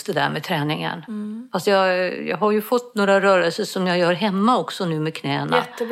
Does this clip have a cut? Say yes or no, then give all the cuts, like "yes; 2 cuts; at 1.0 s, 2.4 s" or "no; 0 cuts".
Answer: no; 0 cuts